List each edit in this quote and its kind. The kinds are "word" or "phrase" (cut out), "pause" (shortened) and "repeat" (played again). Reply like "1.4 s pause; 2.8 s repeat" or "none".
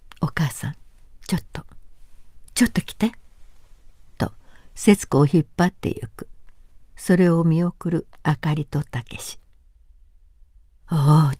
none